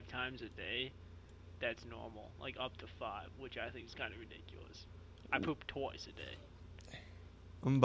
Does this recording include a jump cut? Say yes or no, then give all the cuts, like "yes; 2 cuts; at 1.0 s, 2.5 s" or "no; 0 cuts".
no; 0 cuts